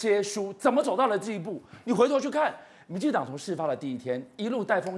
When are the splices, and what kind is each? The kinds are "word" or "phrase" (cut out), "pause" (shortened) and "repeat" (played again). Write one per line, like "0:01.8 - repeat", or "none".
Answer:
none

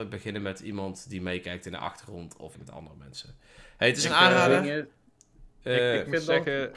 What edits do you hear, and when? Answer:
0:02.5 - word

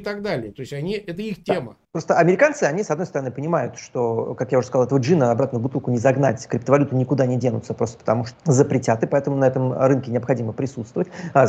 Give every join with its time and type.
0:01.8 - pause
0:08.3 - phrase

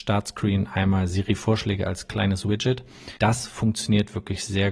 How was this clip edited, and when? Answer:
0:03.2 - pause

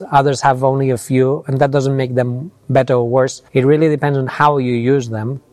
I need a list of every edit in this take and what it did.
0:03.5 - pause

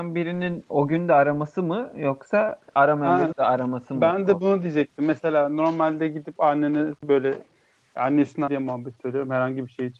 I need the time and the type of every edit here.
0:02.7 - word
0:03.3 - phrase
0:07.0 - pause
0:08.5 - word

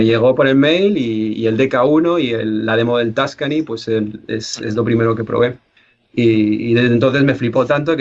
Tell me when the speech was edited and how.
none

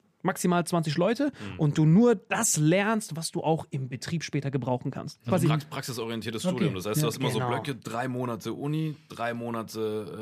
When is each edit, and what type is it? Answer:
none

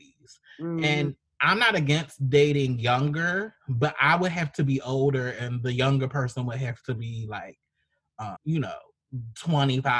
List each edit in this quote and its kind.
0:08.4 - word

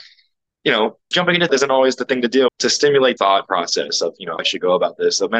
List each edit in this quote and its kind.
0:01.1 - word
0:01.5 - word
0:02.5 - word
0:03.2 - word
0:04.4 - word

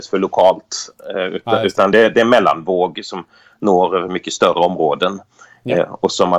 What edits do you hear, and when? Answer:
none

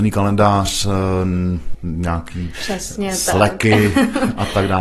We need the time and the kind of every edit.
0:01.7 - word
0:02.5 - word

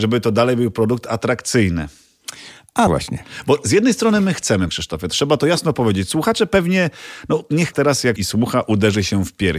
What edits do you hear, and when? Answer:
0:02.9 - word
0:04.7 - word
0:07.7 - phrase
0:08.2 - word

